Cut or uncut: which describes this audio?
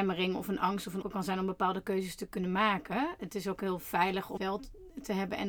cut